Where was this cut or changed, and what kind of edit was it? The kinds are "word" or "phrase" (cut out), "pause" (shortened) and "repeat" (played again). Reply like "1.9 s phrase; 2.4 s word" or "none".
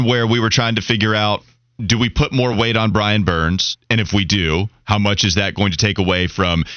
none